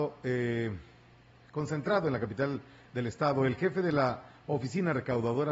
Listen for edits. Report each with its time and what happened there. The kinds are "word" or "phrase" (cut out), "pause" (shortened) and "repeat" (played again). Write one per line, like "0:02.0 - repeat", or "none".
none